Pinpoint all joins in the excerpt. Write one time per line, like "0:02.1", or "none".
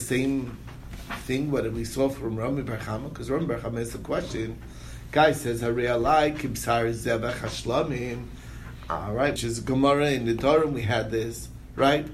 0:09.4